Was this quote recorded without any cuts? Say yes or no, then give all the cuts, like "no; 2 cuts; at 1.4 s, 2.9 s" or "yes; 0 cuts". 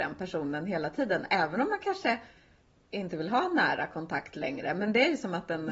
yes; 0 cuts